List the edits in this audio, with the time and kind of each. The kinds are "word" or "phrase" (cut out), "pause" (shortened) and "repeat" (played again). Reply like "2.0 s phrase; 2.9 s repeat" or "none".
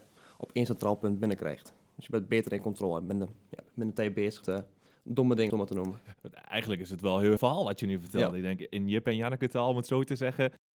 4.4 s word; 5.5 s phrase; 6.2 s pause; 7.4 s word